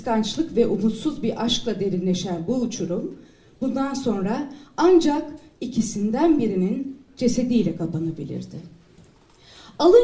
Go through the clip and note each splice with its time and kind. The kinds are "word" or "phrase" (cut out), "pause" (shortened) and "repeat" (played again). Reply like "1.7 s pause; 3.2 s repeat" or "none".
none